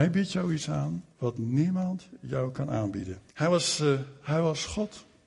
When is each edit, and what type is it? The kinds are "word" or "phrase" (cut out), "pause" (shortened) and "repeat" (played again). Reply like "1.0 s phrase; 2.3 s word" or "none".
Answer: 1.1 s pause; 3.3 s pause